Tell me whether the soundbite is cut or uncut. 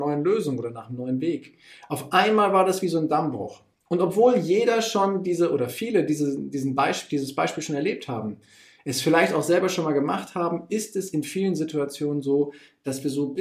uncut